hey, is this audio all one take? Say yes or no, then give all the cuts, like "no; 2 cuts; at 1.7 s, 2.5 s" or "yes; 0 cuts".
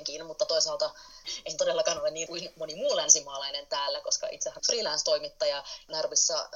no; 2 cuts; at 2.3 s, 4.6 s